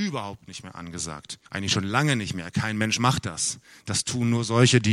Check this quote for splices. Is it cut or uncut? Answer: cut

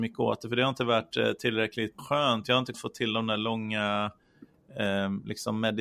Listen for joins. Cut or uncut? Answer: cut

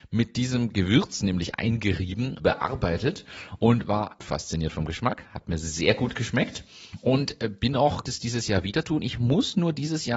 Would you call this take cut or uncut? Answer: cut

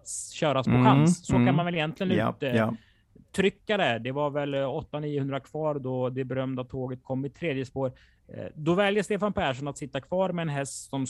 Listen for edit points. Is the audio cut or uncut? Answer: uncut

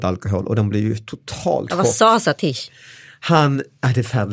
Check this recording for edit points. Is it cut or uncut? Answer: uncut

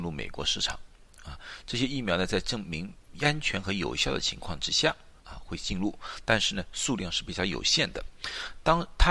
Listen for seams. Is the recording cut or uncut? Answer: cut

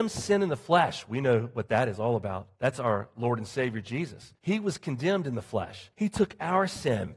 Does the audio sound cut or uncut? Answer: cut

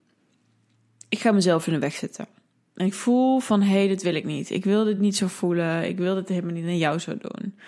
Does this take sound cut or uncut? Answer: uncut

